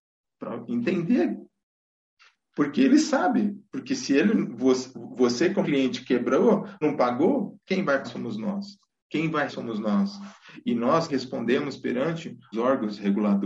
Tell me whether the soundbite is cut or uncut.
cut